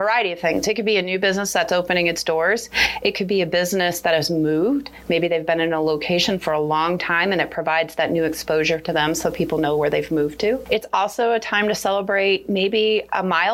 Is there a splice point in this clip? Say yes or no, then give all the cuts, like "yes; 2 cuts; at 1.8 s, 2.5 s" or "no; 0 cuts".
no; 0 cuts